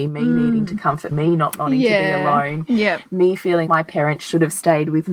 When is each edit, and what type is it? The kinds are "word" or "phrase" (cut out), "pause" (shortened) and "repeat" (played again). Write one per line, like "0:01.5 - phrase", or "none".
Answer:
0:01.1 - word
0:03.7 - word